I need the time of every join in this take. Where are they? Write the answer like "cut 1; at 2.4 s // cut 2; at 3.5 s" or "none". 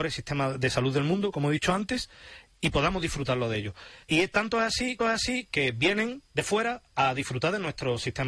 cut 1; at 4.0 s // cut 2; at 5.0 s // cut 3; at 6.3 s